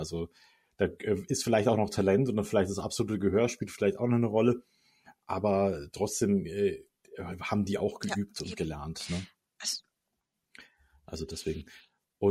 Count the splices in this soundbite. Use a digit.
0